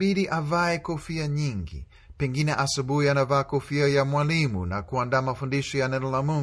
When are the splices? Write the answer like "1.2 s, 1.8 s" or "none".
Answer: none